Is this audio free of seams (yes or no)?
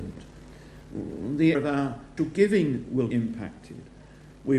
no